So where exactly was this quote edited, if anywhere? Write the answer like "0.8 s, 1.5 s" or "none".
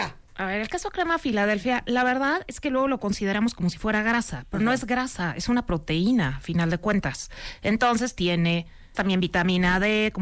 8.9 s